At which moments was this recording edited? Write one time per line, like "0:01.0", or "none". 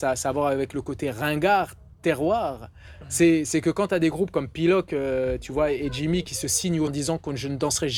0:06.9